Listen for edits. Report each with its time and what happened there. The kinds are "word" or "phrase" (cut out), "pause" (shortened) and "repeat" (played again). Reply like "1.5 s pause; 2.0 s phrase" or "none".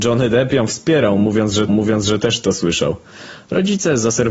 1.7 s repeat